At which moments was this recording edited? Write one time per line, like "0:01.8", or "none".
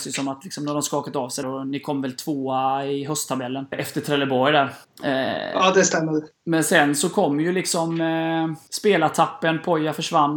0:01.4
0:03.7
0:04.8
0:08.7